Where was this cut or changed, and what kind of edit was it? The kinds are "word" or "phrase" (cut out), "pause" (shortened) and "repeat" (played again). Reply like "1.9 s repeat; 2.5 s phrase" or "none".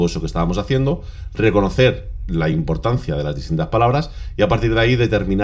none